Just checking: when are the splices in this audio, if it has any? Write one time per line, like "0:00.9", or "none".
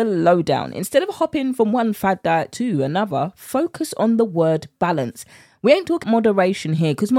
0:06.0